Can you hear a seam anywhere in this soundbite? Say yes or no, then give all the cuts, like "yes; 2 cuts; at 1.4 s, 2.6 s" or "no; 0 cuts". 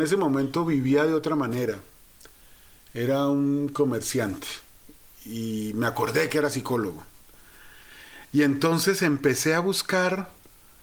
no; 0 cuts